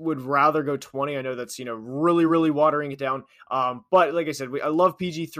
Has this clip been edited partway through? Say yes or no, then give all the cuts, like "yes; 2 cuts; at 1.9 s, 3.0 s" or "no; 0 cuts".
no; 0 cuts